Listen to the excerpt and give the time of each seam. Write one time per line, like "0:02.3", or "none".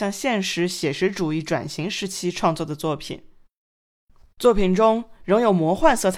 none